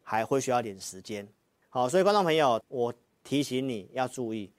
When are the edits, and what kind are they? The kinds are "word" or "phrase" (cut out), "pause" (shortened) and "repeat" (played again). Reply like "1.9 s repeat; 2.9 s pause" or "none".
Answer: 2.6 s phrase